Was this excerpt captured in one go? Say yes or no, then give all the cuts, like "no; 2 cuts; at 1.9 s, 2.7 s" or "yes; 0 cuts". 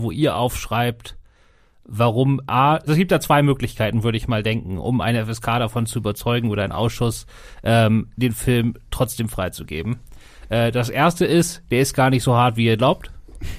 no; 1 cut; at 2.9 s